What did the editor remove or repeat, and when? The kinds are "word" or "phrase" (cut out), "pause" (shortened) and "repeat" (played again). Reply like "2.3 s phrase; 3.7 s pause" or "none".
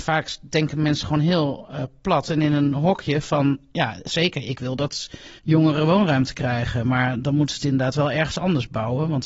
5.4 s pause